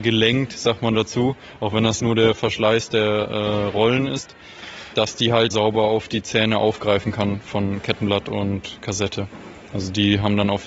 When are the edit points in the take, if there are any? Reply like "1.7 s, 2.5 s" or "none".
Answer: 2.0 s, 4.9 s, 5.5 s

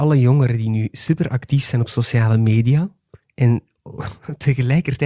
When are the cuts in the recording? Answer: none

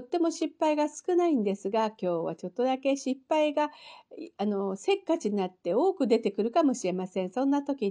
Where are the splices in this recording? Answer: none

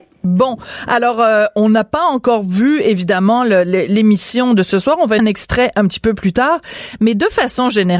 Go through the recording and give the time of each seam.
5.2 s

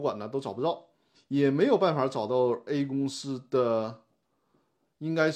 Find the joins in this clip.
1.1 s

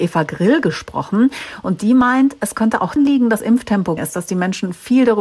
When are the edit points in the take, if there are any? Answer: 3.0 s, 3.4 s, 4.0 s

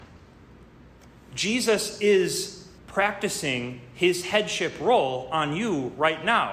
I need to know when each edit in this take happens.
2.8 s

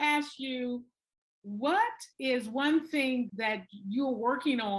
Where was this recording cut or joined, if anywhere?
2.1 s, 3.3 s

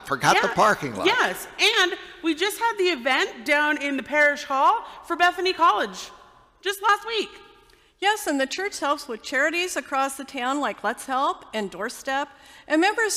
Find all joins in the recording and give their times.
none

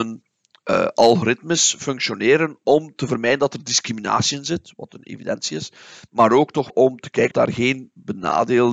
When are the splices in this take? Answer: 6.7 s, 7.3 s

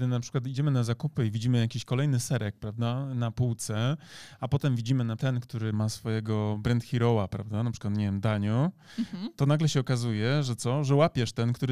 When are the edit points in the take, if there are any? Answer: 5.2 s, 5.7 s

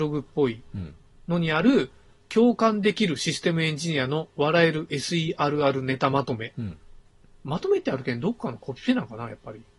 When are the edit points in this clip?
none

